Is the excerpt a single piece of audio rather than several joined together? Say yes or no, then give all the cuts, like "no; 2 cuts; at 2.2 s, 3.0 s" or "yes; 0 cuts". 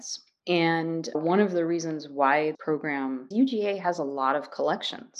no; 3 cuts; at 1.1 s, 2.5 s, 3.3 s